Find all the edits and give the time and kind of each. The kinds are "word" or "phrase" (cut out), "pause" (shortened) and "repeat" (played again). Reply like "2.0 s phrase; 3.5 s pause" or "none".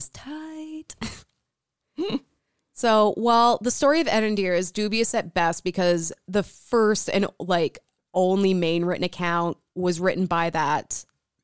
none